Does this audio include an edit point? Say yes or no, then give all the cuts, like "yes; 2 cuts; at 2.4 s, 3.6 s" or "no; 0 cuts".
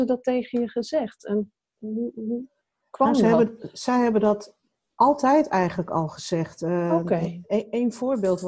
no; 0 cuts